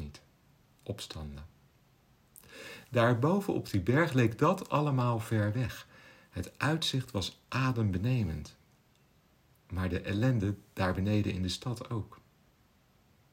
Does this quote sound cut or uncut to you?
uncut